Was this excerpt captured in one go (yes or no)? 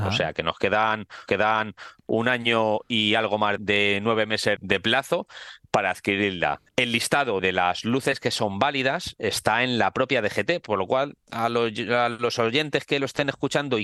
no